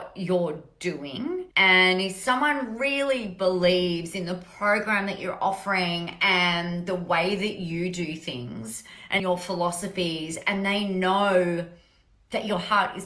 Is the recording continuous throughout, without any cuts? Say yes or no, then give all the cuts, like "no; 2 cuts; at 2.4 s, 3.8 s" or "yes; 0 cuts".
no; 2 cuts; at 1.5 s, 9.2 s